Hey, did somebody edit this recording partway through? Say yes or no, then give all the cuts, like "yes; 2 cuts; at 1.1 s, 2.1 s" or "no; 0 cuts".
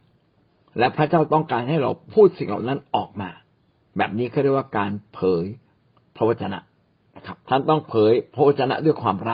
yes; 1 cut; at 7.4 s